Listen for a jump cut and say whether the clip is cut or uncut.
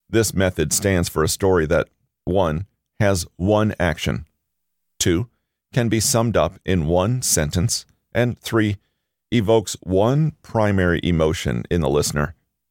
uncut